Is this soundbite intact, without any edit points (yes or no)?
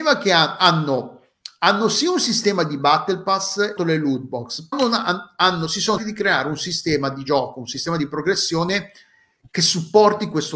no